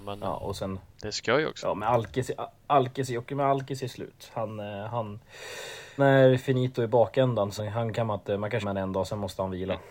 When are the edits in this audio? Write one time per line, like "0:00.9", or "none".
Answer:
0:06.0
0:07.6
0:08.6